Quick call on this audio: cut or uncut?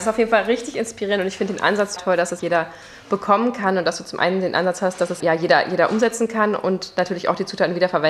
cut